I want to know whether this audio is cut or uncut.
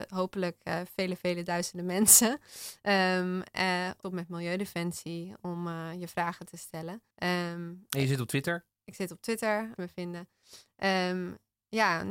cut